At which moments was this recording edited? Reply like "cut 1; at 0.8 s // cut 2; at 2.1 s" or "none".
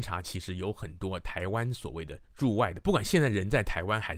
cut 1; at 2.2 s